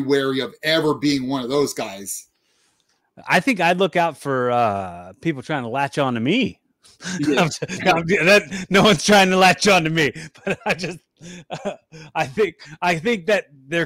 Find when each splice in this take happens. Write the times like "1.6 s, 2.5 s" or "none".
none